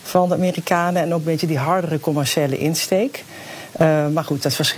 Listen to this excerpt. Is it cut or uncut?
uncut